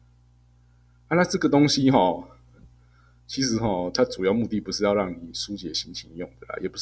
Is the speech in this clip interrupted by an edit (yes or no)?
no